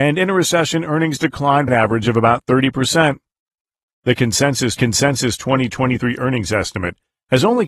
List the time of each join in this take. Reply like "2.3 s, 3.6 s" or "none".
1.7 s, 4.8 s